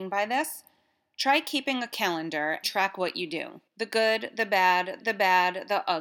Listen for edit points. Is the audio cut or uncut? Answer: cut